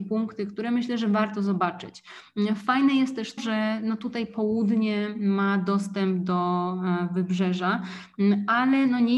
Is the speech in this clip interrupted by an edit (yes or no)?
yes